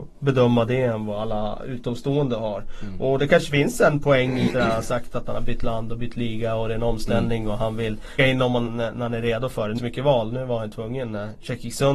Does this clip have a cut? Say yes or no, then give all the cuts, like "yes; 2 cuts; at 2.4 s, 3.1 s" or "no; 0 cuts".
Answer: yes; 4 cuts; at 4.5 s, 8.2 s, 8.7 s, 9.8 s